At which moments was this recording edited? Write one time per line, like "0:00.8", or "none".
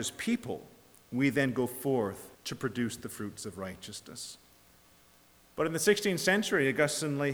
0:02.3